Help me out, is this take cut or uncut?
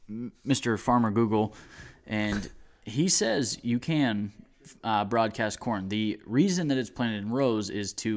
cut